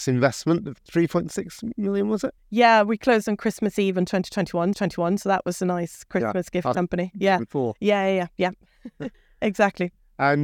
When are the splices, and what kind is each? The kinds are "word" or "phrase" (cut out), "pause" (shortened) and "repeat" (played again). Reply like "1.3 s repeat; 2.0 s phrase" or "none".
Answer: 4.7 s repeat; 6.7 s word